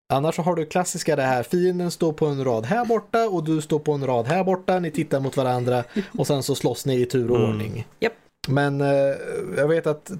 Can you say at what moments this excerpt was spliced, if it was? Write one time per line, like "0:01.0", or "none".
none